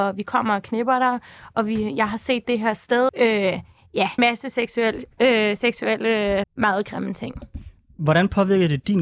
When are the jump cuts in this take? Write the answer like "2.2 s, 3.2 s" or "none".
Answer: 2.4 s, 3.1 s, 4.2 s, 6.4 s